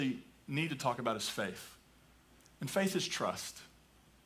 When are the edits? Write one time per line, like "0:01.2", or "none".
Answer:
none

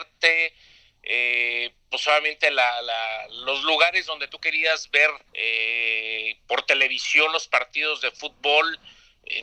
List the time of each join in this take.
0:05.3

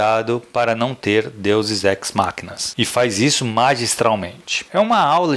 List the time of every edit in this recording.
none

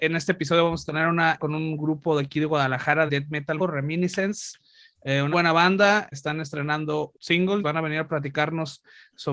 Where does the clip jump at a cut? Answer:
0:01.4
0:03.1
0:03.6
0:05.3
0:06.1
0:07.1
0:07.6

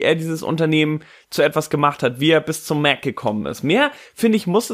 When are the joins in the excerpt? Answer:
none

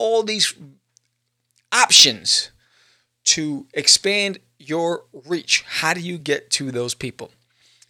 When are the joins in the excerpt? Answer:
none

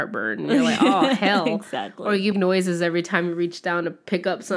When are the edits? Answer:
0:02.3

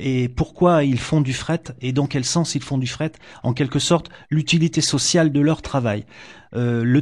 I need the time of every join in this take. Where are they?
none

